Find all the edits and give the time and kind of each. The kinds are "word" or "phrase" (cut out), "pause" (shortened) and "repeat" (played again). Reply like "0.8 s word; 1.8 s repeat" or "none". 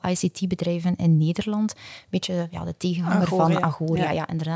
none

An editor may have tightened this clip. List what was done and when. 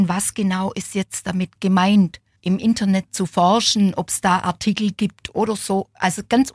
2.4 s pause

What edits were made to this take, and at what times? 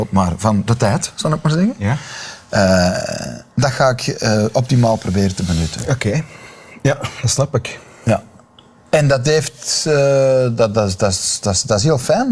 3.5 s pause

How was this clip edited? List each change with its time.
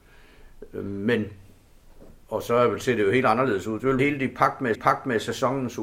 4.0 s word; 4.7 s repeat

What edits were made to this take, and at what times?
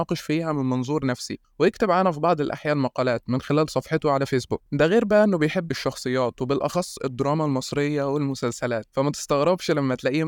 5.7 s word

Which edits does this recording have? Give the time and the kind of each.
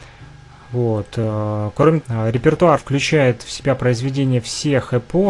2.0 s word; 2.8 s word

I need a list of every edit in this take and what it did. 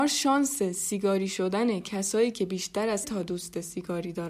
3.0 s word

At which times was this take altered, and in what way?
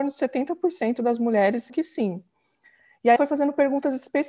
1.7 s word; 3.2 s word

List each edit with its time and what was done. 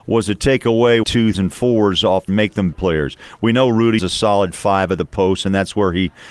1.0 s word; 1.3 s word; 2.3 s word; 2.7 s word; 4.0 s word

